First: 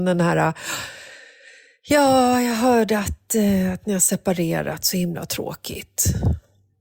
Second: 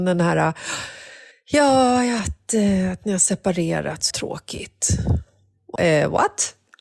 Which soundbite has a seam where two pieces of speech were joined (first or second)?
second